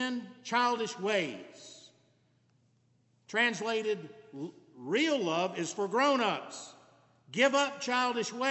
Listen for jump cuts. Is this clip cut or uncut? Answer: uncut